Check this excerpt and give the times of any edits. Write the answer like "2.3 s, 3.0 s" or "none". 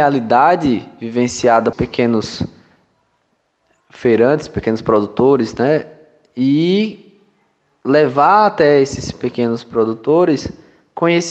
1.7 s